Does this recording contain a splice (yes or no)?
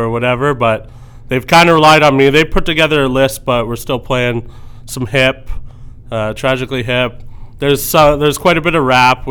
no